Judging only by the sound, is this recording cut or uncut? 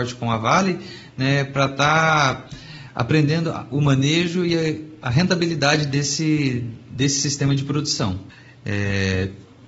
uncut